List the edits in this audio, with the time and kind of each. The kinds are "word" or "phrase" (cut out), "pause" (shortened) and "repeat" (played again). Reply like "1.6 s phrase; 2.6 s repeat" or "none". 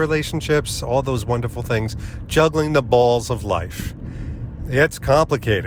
none

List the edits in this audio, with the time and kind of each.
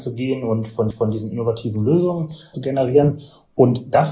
0.9 s repeat; 2.5 s phrase

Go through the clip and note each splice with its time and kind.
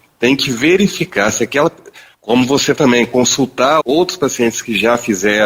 2.1 s pause; 2.8 s word; 3.8 s word

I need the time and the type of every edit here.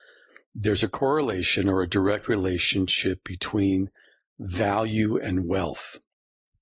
none

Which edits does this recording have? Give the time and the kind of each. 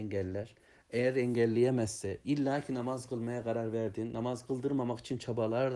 none

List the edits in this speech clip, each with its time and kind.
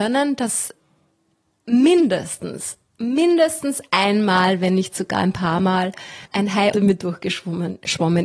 2.9 s pause; 6.3 s pause; 6.7 s word

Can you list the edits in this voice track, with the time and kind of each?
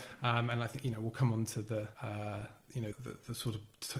1.9 s pause; 2.9 s word

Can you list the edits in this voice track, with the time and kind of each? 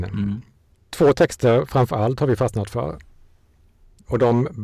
none

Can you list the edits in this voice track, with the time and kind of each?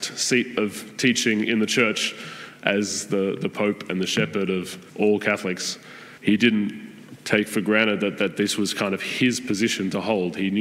4.9 s pause; 6.2 s pause

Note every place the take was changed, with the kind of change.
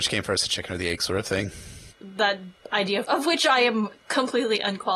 1.9 s word; 3.1 s word

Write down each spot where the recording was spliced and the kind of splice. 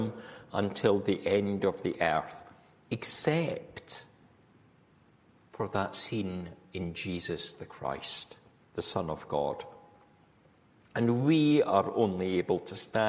none

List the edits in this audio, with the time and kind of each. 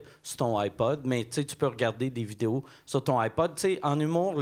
none

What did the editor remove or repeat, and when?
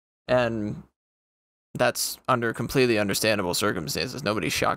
none

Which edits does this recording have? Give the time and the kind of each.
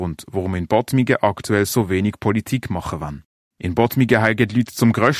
none

